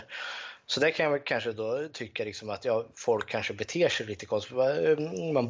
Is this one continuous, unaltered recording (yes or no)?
yes